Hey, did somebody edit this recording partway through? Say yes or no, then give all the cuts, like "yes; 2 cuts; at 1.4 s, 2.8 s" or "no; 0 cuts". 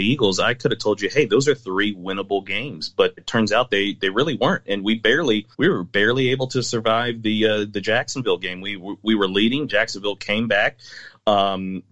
yes; 2 cuts; at 3.2 s, 5.5 s